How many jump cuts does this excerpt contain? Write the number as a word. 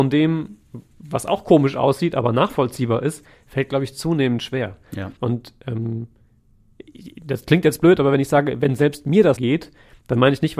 two